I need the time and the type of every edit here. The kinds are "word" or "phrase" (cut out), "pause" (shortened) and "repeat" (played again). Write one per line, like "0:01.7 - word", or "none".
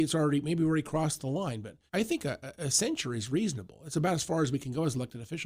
0:01.9 - pause